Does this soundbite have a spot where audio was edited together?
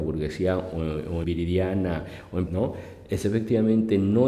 yes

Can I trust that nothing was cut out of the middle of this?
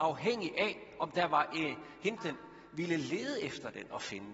no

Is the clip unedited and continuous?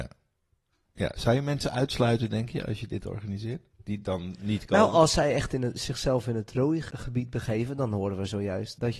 no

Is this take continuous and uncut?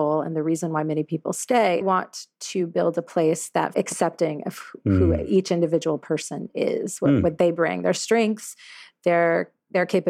no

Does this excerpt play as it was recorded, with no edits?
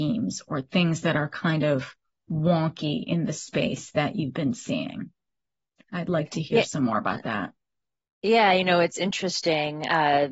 yes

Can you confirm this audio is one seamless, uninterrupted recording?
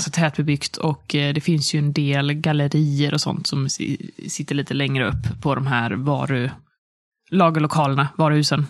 yes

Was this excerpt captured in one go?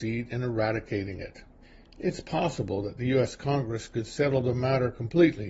no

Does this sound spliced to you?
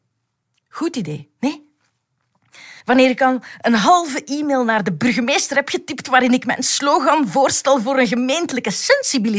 yes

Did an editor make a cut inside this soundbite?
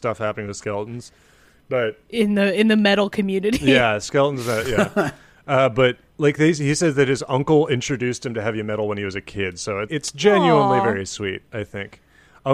yes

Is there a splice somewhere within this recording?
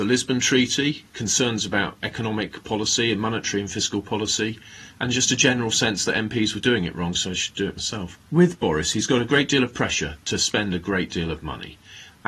yes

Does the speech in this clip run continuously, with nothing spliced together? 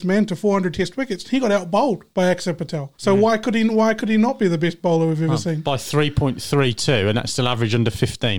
no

